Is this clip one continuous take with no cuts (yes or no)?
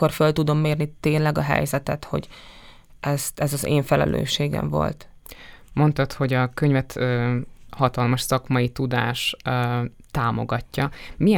yes